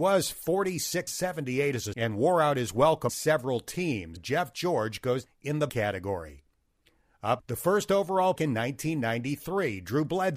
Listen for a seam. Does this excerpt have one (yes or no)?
yes